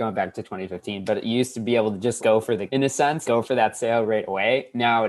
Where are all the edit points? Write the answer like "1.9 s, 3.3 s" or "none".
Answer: 2.2 s, 2.7 s, 3.2 s